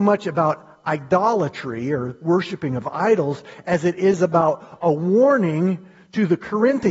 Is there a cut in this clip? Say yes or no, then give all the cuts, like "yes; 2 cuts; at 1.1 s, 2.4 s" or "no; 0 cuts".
no; 0 cuts